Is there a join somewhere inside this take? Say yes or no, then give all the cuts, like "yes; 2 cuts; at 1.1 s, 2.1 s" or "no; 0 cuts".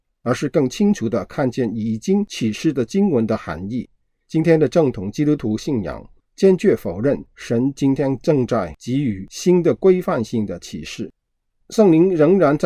no; 0 cuts